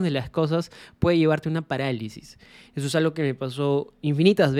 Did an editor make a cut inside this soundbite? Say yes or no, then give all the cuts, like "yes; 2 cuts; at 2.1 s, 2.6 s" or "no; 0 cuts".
no; 0 cuts